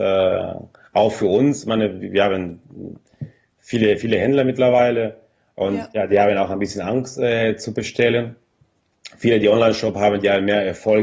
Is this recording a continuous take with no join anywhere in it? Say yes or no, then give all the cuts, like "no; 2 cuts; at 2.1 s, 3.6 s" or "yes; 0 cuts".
yes; 0 cuts